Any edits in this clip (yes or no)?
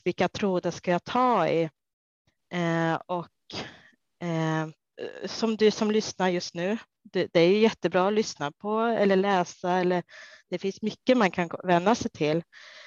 no